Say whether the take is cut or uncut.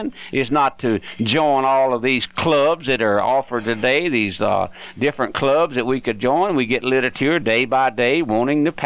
uncut